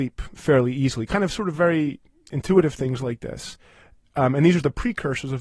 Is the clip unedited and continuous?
yes; 0 cuts

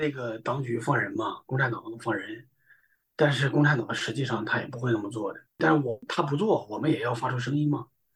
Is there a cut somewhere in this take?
yes; 1 cut; at 5.5 s

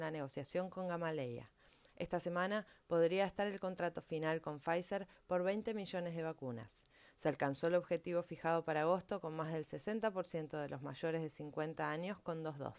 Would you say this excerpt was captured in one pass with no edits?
yes; 0 cuts

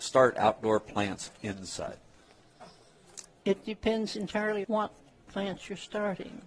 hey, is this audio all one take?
no; 1 cut; at 4.6 s

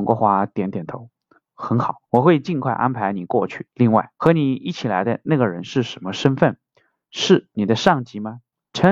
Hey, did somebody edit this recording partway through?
no; 0 cuts

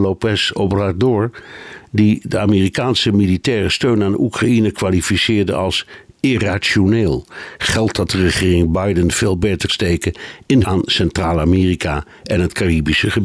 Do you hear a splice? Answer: yes; 2 cuts; at 9.7 s, 10.6 s

